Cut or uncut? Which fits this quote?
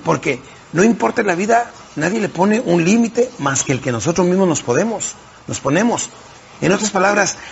uncut